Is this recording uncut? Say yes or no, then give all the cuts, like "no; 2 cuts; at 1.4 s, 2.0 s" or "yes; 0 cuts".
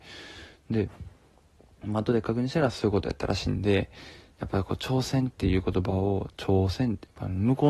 yes; 0 cuts